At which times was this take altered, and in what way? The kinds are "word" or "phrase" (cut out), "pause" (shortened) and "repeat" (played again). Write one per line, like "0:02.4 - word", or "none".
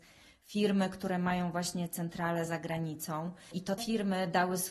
0:03.8 - word